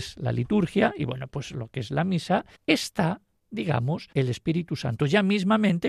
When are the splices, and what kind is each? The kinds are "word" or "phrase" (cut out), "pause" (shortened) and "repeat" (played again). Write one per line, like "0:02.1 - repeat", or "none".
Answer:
0:02.5 - pause
0:04.1 - pause

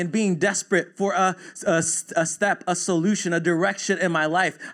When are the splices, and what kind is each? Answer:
none

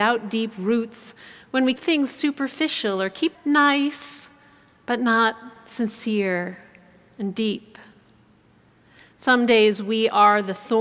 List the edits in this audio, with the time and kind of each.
0:01.8 - word
0:03.3 - word

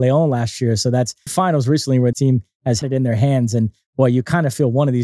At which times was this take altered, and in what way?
0:01.3 - word
0:02.1 - word
0:02.8 - word

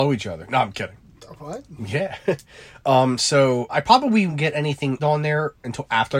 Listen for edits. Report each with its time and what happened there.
0:03.7 - word
0:04.3 - word
0:05.0 - word

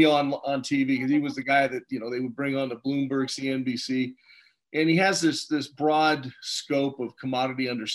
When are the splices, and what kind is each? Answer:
none

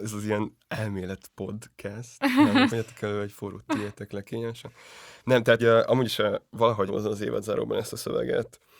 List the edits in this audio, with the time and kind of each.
0:02.7 - word
0:03.7 - word
0:05.6 - word
0:06.9 - phrase

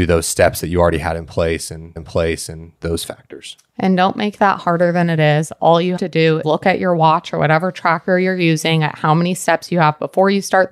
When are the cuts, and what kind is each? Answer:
0:02.0 - repeat
0:06.0 - word
0:06.4 - word

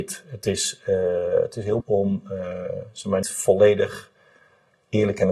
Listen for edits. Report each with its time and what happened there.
0:01.8 - word
0:03.2 - word

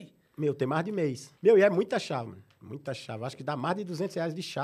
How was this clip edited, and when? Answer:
0:01.4 - pause

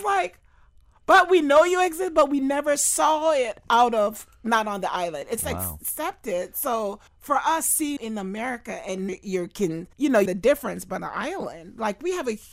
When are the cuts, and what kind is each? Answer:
0:07.1 - pause
0:08.0 - word
0:09.1 - phrase
0:09.9 - pause
0:10.3 - word
0:11.0 - word

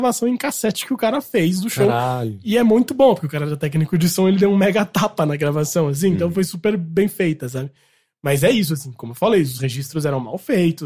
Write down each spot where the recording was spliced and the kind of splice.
none

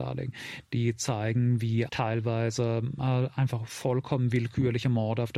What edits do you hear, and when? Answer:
0:01.9 - phrase

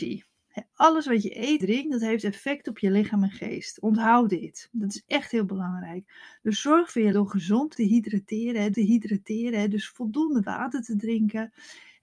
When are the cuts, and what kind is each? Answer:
0:01.6 - word
0:07.1 - word
0:07.7 - phrase
0:08.7 - repeat

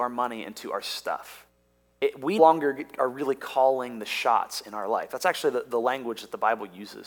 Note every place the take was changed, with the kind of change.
0:02.4 - word

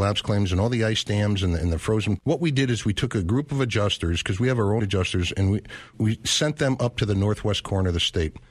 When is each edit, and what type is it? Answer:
0:02.2 - word
0:04.8 - word
0:05.9 - word

